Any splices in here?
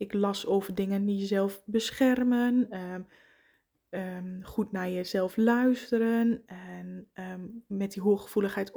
no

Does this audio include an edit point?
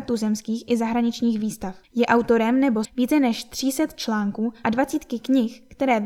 yes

